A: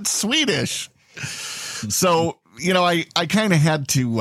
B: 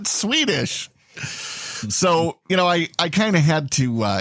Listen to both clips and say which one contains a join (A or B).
B